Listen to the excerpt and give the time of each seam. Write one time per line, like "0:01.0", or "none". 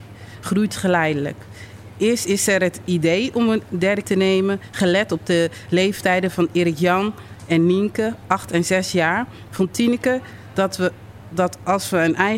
0:04.0